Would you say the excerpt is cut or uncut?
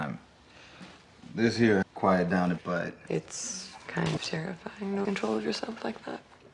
cut